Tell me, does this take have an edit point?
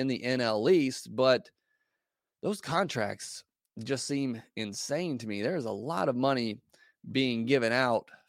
no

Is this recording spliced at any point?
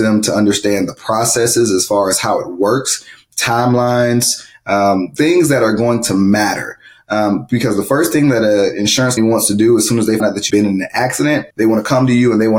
yes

